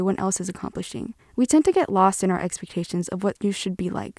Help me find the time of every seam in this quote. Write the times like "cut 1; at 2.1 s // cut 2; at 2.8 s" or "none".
cut 1; at 1.2 s